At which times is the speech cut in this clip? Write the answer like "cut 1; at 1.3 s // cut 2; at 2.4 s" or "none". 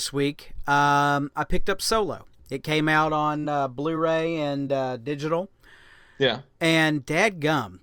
none